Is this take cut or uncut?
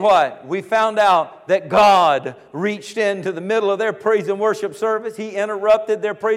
uncut